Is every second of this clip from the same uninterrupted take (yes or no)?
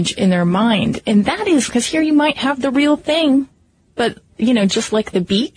no